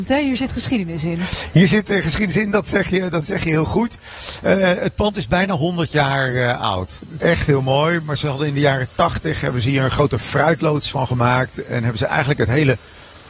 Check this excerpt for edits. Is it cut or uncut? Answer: uncut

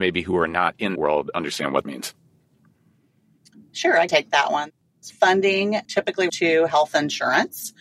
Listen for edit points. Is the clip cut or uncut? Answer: cut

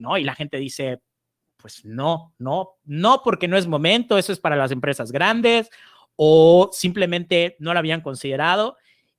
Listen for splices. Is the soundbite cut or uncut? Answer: uncut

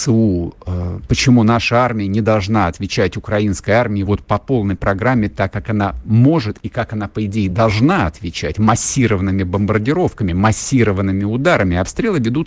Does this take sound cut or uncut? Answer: uncut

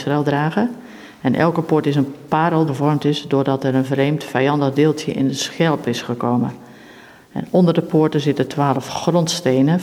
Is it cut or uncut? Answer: cut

